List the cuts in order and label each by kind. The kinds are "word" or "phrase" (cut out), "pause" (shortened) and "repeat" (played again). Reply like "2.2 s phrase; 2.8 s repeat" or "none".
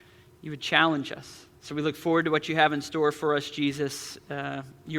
1.6 s pause